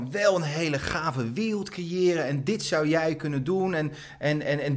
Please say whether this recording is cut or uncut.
uncut